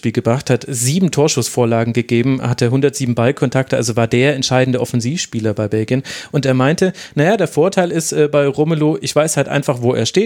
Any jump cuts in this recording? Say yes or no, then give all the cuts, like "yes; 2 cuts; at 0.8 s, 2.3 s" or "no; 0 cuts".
no; 0 cuts